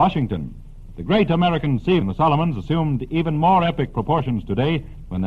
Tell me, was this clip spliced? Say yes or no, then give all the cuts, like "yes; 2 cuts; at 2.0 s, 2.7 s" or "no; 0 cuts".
yes; 1 cut; at 2.0 s